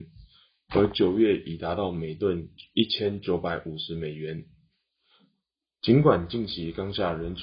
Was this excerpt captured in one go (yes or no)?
yes